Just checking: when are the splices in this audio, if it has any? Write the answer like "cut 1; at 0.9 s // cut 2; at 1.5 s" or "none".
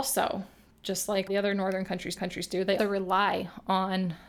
cut 1; at 1.3 s // cut 2; at 2.2 s // cut 3; at 2.8 s